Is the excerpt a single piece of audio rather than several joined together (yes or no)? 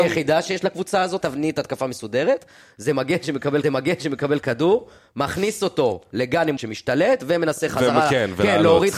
no